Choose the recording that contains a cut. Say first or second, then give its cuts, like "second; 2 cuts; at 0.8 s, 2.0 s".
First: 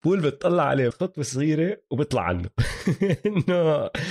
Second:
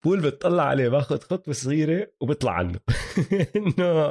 first; 1 cut; at 0.9 s